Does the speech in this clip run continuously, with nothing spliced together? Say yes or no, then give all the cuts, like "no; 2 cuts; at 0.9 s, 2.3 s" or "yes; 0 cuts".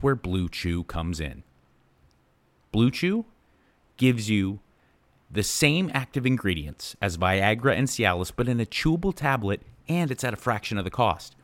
yes; 0 cuts